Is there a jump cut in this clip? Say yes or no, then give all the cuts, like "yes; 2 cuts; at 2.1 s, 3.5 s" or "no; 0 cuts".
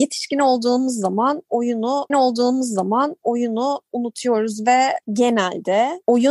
yes; 2 cuts; at 2.1 s, 5.0 s